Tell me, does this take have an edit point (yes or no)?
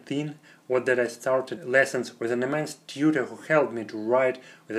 yes